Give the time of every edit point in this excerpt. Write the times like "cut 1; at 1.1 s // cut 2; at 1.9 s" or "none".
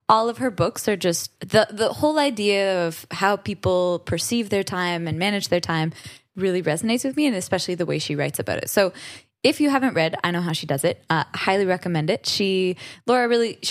cut 1; at 1.4 s